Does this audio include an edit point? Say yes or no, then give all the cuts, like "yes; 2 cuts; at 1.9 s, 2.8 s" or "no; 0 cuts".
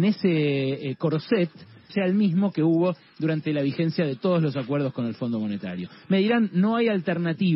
yes; 1 cut; at 1.9 s